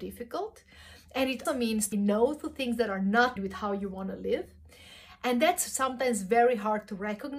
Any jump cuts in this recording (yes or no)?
yes